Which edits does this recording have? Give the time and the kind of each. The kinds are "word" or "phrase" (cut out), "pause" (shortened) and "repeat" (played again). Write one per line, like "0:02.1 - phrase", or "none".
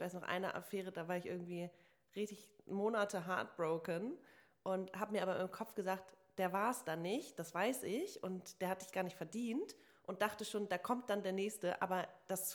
none